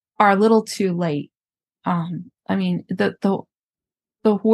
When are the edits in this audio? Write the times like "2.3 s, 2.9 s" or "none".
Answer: none